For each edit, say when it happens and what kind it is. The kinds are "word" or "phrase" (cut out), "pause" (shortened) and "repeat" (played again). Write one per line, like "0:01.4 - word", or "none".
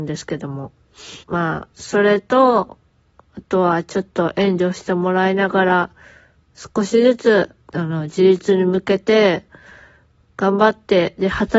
0:01.2 - pause
0:01.7 - pause
0:07.6 - pause